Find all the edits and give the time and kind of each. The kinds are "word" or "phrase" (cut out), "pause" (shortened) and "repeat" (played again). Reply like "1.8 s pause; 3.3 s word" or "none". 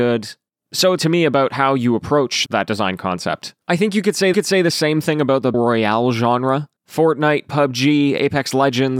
1.0 s word; 2.5 s word; 3.6 s pause; 4.3 s repeat; 5.5 s word; 6.8 s pause